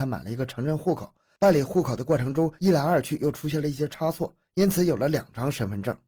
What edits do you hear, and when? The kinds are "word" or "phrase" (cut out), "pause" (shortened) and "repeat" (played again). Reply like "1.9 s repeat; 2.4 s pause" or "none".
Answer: none